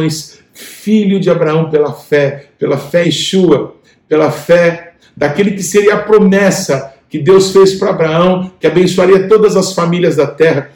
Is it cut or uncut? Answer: cut